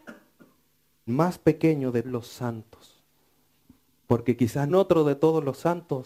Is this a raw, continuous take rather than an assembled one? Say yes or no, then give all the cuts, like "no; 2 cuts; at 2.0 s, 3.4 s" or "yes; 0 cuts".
no; 3 cuts; at 1.1 s, 2.0 s, 4.7 s